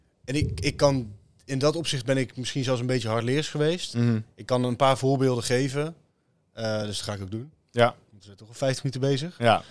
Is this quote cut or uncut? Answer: uncut